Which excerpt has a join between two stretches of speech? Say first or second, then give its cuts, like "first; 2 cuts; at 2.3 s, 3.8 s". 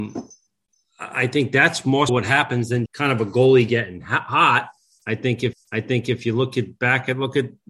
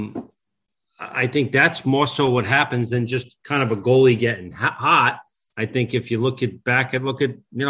first; 3 cuts; at 2.1 s, 2.9 s, 5.5 s